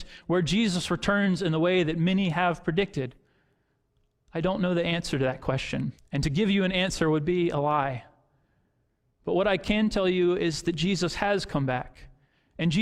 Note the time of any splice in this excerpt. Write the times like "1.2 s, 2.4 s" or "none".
6.0 s